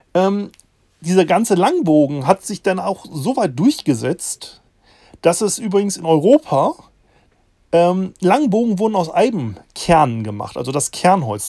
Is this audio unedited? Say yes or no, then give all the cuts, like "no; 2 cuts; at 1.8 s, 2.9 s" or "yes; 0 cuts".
yes; 0 cuts